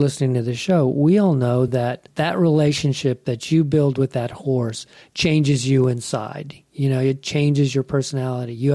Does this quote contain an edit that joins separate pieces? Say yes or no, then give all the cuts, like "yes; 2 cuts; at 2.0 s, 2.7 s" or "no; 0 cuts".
no; 0 cuts